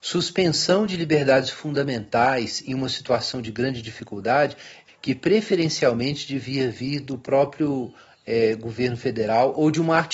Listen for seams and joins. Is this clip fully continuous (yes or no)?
no